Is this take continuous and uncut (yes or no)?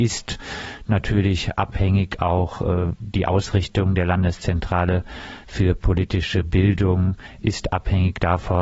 yes